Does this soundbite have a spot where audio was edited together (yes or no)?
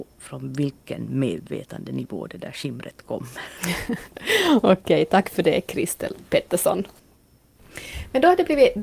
no